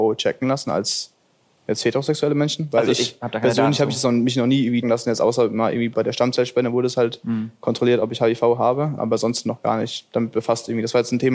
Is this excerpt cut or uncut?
cut